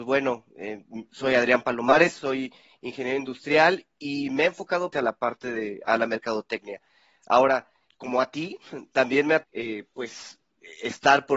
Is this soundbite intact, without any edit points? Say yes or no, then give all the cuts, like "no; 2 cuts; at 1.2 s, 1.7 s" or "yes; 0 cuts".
no; 3 cuts; at 4.9 s, 7.9 s, 9.4 s